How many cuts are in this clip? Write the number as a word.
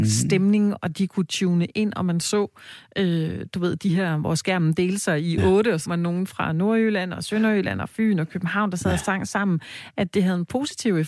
one